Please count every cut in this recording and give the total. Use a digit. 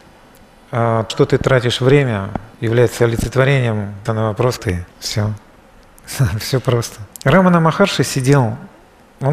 6